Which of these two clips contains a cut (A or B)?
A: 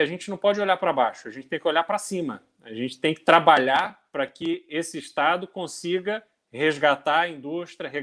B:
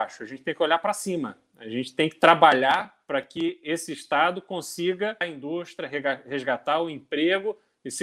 B